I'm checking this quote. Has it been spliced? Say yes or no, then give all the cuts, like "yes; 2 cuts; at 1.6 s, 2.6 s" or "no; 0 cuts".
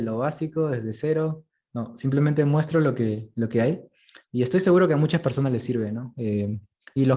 no; 0 cuts